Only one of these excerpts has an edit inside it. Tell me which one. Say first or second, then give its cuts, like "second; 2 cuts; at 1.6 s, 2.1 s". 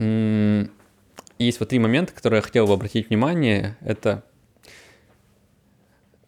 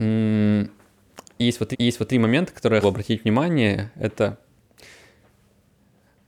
second; 2 cuts; at 1.7 s, 2.8 s